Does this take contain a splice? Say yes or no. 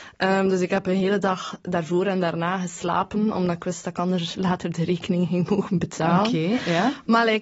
no